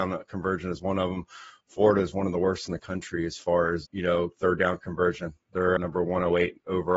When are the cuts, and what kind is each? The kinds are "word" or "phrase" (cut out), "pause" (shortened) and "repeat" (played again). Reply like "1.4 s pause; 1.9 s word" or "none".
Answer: 3.8 s word; 5.8 s word